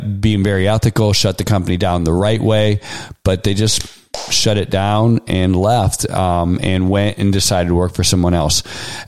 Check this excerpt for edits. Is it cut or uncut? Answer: uncut